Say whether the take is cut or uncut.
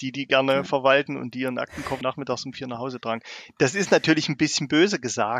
cut